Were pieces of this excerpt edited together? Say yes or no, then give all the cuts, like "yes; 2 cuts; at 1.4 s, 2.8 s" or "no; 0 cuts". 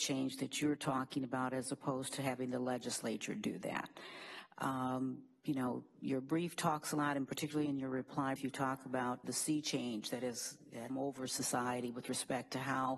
yes; 3 cuts; at 8.4 s, 9.2 s, 10.9 s